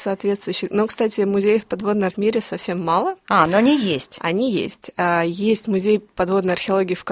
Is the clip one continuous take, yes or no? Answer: no